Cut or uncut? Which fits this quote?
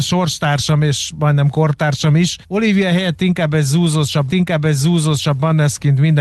cut